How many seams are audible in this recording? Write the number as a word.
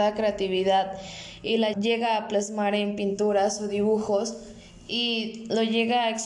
one